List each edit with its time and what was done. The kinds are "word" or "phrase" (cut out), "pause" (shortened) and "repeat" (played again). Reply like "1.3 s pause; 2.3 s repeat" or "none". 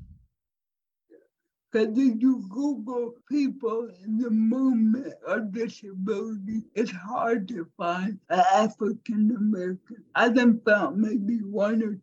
3.2 s pause; 6.7 s pause; 8.2 s pause; 10.1 s pause